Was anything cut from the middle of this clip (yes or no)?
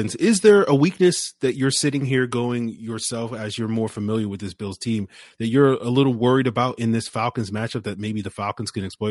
no